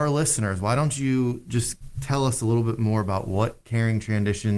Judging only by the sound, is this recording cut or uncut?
uncut